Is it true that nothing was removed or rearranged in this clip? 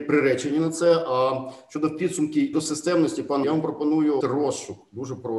no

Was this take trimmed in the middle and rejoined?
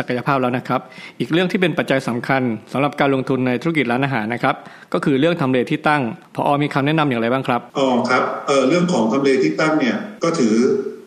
yes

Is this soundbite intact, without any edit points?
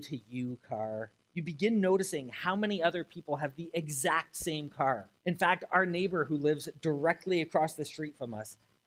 no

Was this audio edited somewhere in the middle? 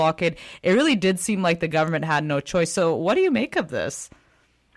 no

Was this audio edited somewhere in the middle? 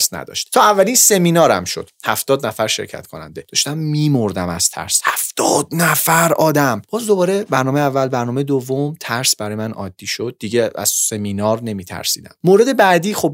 no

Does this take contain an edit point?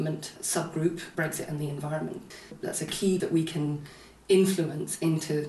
yes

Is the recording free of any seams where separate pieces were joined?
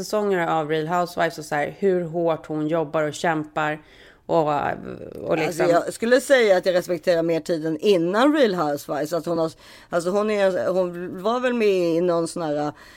yes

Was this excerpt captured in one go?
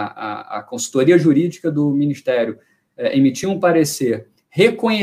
yes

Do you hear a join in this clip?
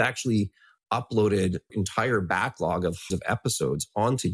yes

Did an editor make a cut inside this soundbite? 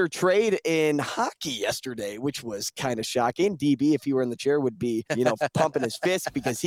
yes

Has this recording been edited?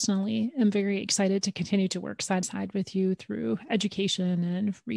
yes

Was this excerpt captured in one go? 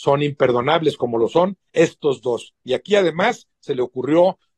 yes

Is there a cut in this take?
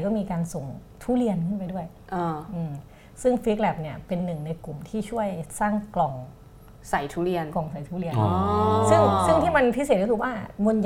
no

